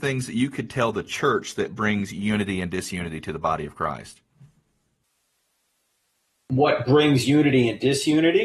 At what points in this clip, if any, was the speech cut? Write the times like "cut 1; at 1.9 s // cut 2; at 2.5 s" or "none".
none